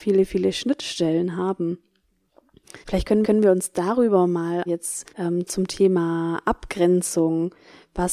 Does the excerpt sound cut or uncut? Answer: cut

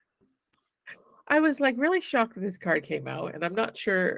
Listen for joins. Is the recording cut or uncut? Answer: uncut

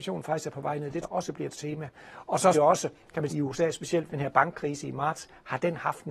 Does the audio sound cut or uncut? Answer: cut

